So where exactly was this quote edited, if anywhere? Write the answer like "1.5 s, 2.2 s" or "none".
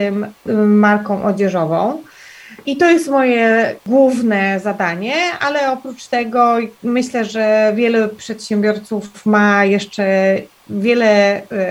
none